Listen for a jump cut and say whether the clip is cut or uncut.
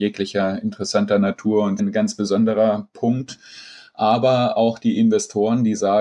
cut